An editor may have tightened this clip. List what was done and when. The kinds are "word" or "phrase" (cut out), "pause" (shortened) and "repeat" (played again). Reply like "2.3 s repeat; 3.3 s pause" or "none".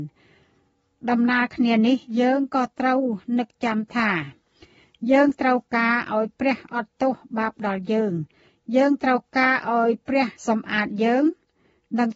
10.4 s pause